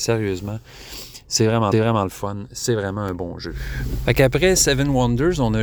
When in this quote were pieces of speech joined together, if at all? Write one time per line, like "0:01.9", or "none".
0:01.7